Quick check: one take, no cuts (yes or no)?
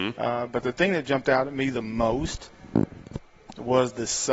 yes